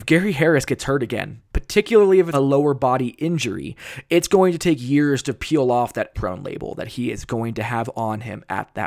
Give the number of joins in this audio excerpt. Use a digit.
3